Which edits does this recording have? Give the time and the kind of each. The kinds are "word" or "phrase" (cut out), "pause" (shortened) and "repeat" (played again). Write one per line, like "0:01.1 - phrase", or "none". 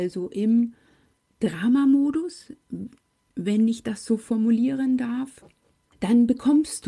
none